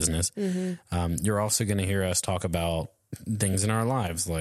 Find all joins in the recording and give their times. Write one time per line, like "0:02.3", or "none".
none